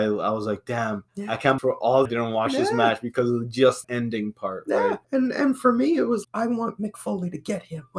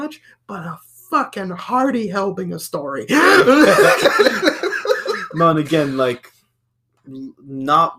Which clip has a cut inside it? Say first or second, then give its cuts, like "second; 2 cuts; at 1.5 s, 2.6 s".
first; 6 cuts; at 1.1 s, 1.6 s, 2.1 s, 3.8 s, 5.0 s, 6.2 s